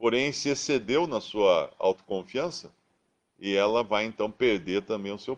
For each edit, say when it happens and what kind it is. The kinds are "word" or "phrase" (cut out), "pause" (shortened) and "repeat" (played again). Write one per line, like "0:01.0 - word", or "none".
none